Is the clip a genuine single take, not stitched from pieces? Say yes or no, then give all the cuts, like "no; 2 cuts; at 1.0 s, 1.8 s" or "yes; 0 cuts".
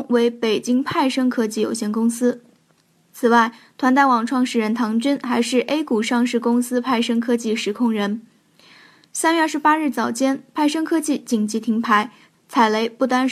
yes; 0 cuts